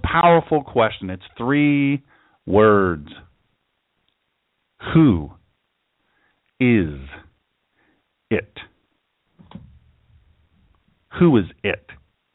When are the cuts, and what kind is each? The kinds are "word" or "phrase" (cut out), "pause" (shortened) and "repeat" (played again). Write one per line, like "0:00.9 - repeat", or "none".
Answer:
none